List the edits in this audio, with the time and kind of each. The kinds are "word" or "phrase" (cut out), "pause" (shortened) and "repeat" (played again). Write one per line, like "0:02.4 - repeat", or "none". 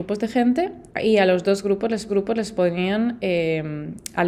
0:00.9 - pause
0:02.1 - repeat